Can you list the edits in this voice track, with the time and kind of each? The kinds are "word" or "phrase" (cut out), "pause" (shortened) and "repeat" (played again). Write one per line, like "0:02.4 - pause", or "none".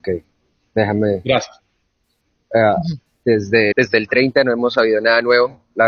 0:03.7 - word